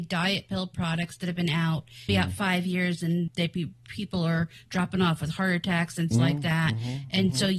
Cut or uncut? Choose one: cut